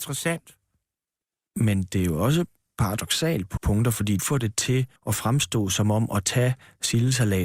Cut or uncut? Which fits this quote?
cut